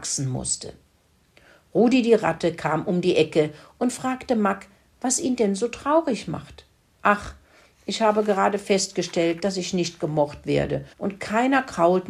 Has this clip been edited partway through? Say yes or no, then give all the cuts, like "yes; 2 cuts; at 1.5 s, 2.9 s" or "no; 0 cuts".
yes; 1 cut; at 10.9 s